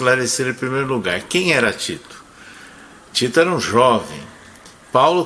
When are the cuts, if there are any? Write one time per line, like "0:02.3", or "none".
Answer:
none